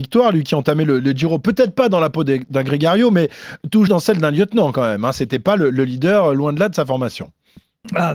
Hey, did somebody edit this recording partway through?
yes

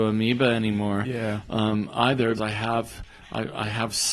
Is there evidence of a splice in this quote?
yes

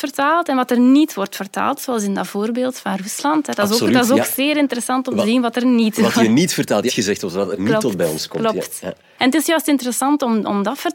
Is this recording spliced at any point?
yes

